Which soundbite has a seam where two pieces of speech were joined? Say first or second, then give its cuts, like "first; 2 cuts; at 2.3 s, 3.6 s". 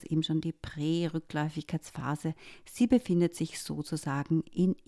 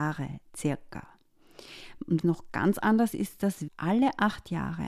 second; 3 cuts; at 2.2 s, 3.1 s, 3.7 s